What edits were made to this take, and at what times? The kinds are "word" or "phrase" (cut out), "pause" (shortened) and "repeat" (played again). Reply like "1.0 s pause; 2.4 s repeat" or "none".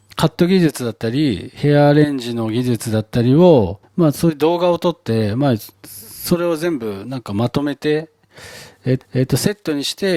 3.8 s pause; 5.7 s pause; 9.0 s repeat

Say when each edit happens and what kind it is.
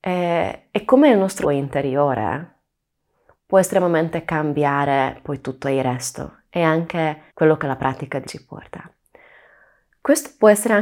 1.4 s word; 7.3 s pause; 8.2 s word

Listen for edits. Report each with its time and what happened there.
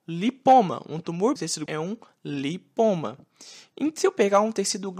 1.4 s word; 1.7 s word

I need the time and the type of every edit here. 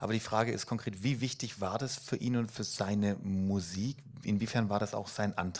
none

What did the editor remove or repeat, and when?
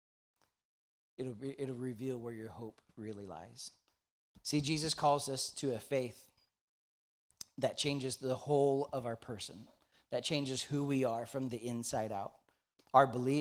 none

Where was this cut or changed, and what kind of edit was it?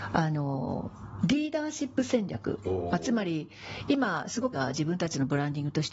4.5 s word

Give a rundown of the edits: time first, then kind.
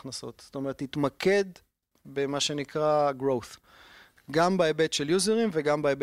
none

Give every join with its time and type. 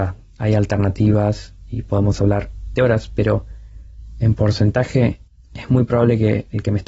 2.8 s word; 5.3 s pause

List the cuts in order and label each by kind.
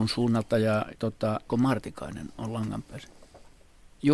0.9 s word; 1.5 s word

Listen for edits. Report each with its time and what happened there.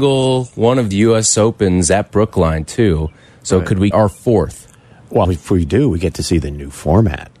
0.9 s word; 3.9 s word; 5.2 s word

